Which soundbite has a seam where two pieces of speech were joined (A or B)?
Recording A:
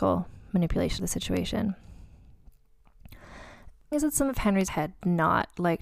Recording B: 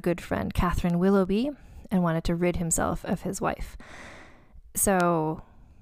A